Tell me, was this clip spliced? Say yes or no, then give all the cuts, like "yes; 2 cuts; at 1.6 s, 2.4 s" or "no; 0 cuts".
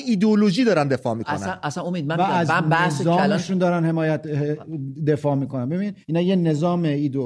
yes; 1 cut; at 6.0 s